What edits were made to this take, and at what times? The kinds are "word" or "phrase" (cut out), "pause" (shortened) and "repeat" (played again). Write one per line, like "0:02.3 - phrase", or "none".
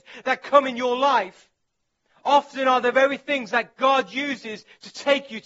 none